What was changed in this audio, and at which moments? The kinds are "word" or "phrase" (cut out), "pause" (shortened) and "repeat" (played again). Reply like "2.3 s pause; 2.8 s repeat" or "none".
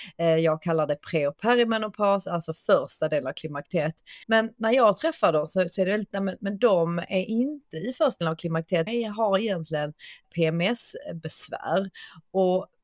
4.2 s pause; 6.1 s word; 8.2 s word; 8.9 s phrase; 10.2 s word